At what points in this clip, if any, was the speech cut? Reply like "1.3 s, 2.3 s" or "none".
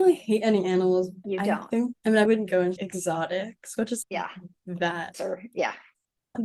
1.2 s, 1.9 s, 2.3 s, 2.8 s, 4.0 s, 5.1 s